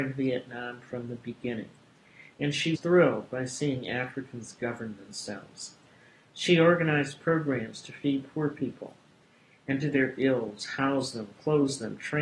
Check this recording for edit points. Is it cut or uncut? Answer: cut